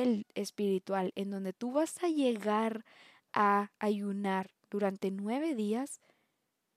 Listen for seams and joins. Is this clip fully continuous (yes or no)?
yes